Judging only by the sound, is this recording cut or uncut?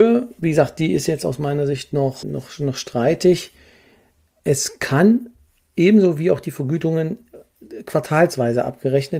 cut